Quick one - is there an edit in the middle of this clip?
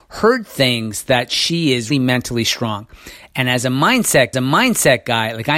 yes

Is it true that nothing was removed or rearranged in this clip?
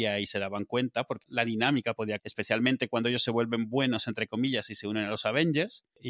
no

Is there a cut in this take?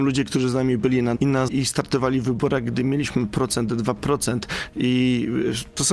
yes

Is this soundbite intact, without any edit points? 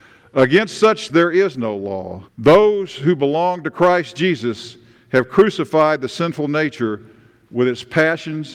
no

